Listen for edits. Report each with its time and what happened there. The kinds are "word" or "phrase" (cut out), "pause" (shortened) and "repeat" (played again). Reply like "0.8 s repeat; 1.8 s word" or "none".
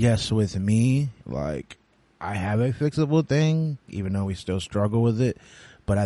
1.2 s pause